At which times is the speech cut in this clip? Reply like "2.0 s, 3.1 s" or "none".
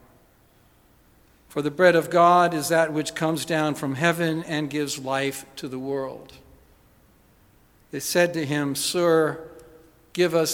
none

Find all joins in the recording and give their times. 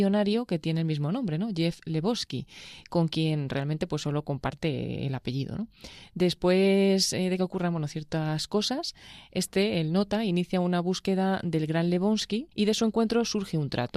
12.5 s

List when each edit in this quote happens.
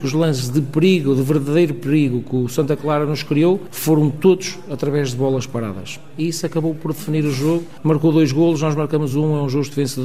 none

